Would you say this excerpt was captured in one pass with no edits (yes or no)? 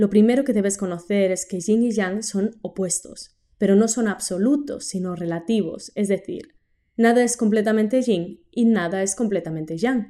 yes